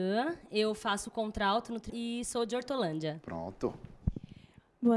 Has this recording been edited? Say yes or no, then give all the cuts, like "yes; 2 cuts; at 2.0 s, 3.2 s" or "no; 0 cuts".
yes; 1 cut; at 1.9 s